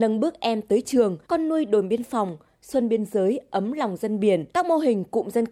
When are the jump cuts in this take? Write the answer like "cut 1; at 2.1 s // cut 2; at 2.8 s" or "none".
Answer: cut 1; at 1.2 s // cut 2; at 4.5 s